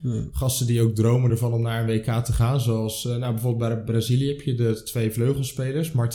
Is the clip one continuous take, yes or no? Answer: yes